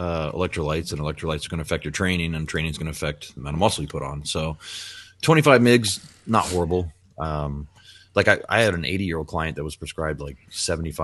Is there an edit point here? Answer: no; 0 cuts

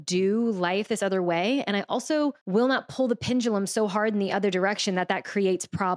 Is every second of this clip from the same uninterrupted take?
no; 1 cut; at 2.4 s

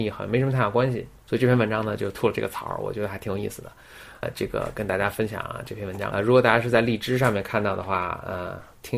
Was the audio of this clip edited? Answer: yes; 2 cuts; at 4.2 s, 6.1 s

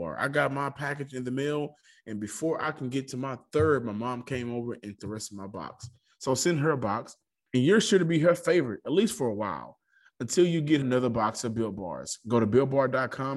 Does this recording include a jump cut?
yes; 2 cuts; at 5.0 s, 10.8 s

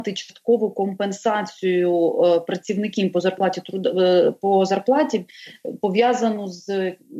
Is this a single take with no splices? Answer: yes; 0 cuts

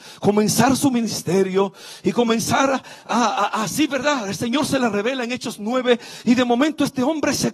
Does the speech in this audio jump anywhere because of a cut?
no; 0 cuts

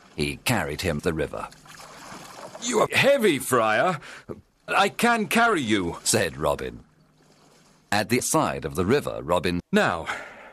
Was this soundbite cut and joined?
yes; 5 cuts; at 1.0 s, 2.9 s, 4.7 s, 8.2 s, 9.6 s

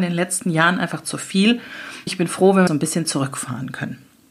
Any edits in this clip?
yes; 2 cuts; at 2.1 s, 2.7 s

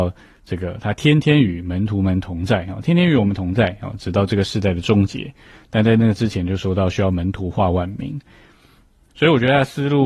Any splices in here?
no; 0 cuts

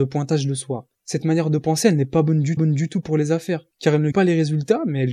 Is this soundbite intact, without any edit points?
no; 4 cuts; at 0.9 s, 2.6 s, 3.7 s, 4.1 s

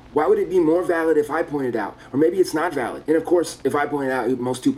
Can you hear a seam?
no; 0 cuts

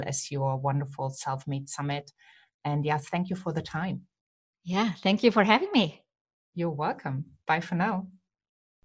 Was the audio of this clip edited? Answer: no; 0 cuts

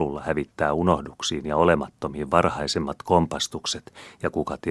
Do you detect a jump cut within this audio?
no; 0 cuts

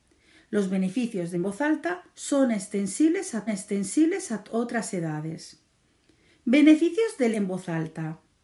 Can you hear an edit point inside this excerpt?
yes; 4 cuts; at 1.3 s, 3.5 s, 5.8 s, 7.3 s

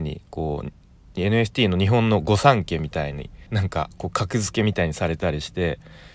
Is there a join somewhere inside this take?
yes; 1 cut; at 3.5 s

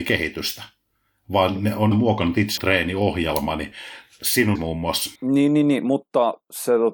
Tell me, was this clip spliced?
yes; 4 cuts; at 1.9 s, 2.6 s, 4.6 s, 5.2 s

